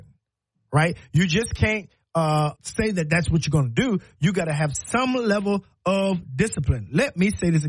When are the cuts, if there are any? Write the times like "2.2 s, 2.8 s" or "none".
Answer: 2.5 s